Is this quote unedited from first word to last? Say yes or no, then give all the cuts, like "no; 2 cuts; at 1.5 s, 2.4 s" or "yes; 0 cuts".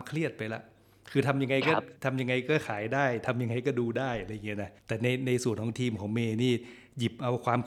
no; 2 cuts; at 2.0 s, 4.8 s